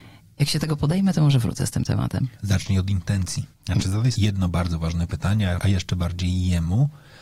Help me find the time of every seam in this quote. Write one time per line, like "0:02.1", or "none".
0:02.3
0:03.5
0:04.1
0:05.6